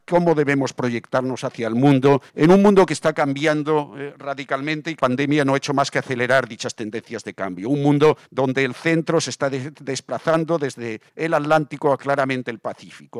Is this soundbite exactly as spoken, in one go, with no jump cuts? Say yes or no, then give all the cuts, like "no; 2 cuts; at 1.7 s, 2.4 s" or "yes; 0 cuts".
no; 4 cuts; at 2.3 s, 5.0 s, 8.2 s, 11.1 s